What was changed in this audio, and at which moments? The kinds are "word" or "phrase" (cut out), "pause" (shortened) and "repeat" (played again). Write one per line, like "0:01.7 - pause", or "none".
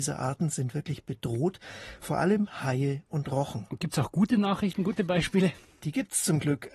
none